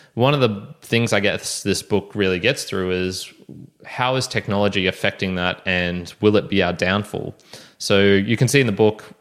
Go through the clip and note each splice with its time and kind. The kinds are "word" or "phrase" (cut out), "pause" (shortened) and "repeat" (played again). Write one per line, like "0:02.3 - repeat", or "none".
none